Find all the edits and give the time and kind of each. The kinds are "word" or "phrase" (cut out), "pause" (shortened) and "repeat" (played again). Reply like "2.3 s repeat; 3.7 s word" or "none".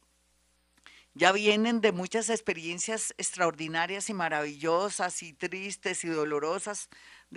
none